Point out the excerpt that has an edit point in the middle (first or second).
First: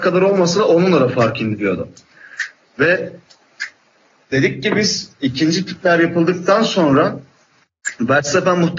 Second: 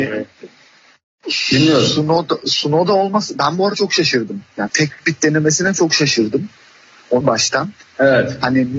second